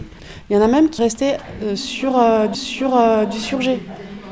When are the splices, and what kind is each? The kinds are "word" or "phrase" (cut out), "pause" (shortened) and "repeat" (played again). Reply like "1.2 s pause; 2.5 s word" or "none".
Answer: 1.0 s word; 2.5 s repeat